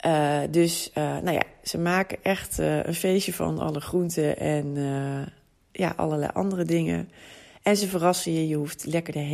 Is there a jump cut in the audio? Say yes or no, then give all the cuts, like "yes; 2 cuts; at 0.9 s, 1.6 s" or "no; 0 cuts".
no; 0 cuts